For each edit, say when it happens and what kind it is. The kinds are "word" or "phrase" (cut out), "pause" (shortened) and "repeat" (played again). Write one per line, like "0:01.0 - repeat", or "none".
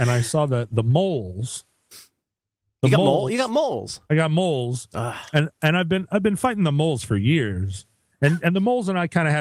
none